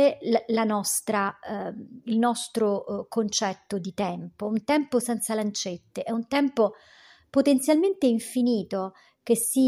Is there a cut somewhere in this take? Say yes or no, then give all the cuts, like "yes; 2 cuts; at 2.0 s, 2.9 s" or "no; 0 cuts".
no; 0 cuts